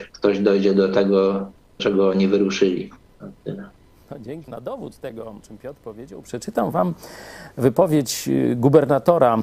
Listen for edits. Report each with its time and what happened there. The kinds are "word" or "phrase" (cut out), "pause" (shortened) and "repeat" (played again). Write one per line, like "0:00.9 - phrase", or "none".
0:01.8 - word
0:04.5 - word
0:05.4 - word